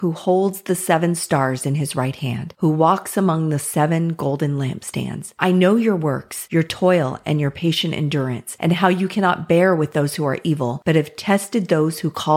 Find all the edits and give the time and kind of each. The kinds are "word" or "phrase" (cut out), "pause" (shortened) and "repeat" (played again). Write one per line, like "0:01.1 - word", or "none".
none